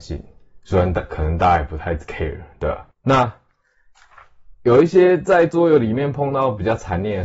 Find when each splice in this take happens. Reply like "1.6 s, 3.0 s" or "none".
2.9 s